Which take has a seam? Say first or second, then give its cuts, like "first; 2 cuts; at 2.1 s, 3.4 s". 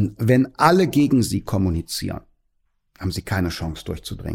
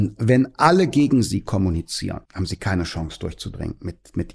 second; 1 cut; at 2.3 s